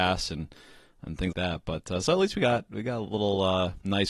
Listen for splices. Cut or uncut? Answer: cut